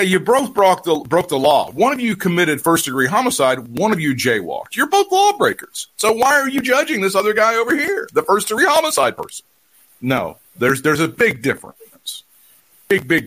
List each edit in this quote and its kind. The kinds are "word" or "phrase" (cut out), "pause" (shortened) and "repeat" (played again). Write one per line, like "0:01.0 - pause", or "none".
none